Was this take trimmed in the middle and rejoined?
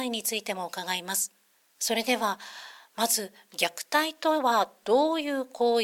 yes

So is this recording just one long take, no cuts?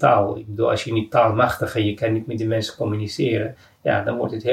yes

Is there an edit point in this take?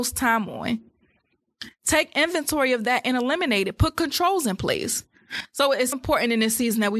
yes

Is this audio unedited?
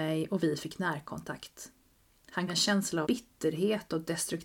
no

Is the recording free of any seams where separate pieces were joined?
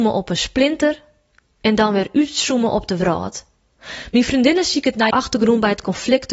no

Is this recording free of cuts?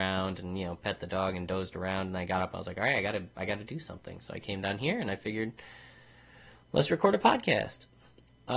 yes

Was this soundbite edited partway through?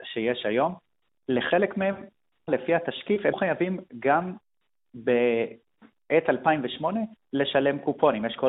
yes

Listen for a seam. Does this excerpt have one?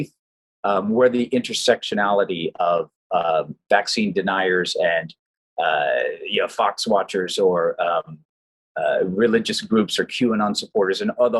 no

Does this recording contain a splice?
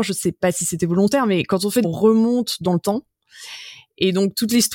yes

